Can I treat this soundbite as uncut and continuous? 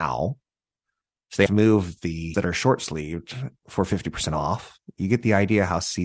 no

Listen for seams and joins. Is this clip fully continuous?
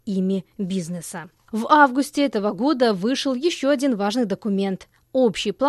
yes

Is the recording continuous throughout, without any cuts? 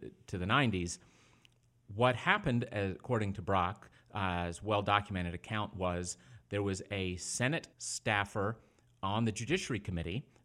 no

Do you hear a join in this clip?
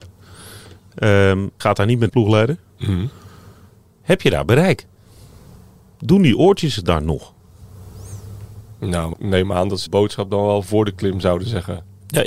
yes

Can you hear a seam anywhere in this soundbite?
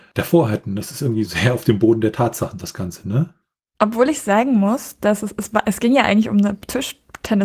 yes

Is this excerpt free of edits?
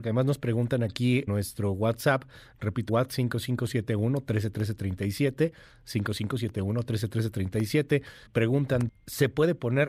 no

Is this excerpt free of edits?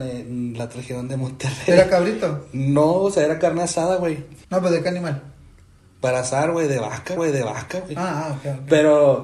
no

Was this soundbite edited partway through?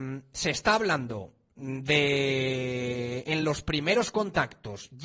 no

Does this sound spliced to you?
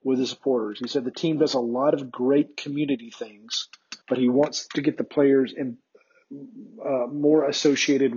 yes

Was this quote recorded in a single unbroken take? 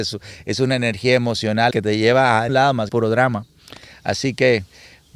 no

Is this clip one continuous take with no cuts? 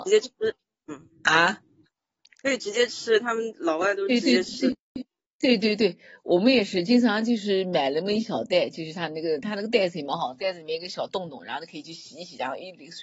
yes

